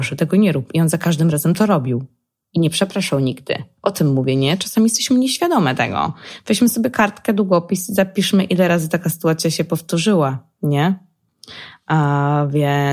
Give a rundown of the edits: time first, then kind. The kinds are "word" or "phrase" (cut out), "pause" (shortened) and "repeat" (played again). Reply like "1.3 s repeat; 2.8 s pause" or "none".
none